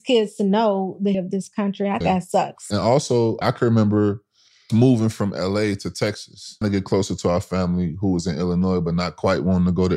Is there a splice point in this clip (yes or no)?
yes